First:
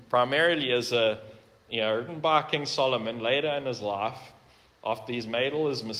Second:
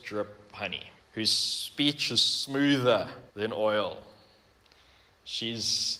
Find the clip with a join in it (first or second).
second